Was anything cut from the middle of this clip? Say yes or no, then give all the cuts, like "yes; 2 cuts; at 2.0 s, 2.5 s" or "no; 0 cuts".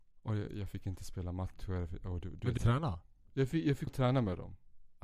yes; 2 cuts; at 2.6 s, 3.9 s